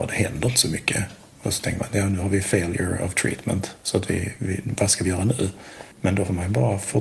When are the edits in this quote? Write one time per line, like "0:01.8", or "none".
0:05.9